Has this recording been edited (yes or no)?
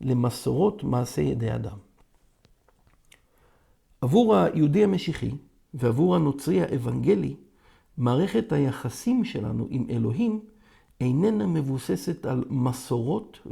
no